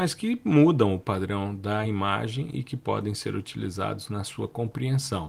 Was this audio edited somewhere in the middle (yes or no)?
no